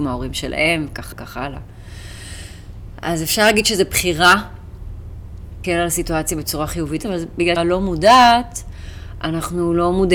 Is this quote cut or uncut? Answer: cut